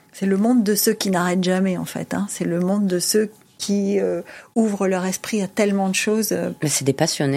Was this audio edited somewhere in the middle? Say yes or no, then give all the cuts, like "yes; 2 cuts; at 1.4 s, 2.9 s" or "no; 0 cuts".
no; 0 cuts